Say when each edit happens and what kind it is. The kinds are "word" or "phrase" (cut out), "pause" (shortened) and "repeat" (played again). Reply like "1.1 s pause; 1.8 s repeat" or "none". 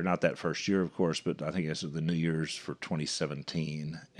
none